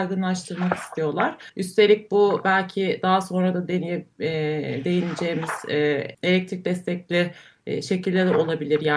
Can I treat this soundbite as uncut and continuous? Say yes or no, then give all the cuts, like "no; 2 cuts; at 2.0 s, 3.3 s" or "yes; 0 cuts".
no; 2 cuts; at 1.5 s, 6.1 s